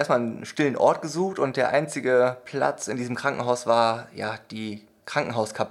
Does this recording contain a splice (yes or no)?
no